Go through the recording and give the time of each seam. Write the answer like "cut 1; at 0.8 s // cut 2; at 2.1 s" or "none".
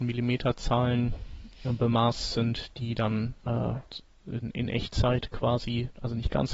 cut 1; at 3.4 s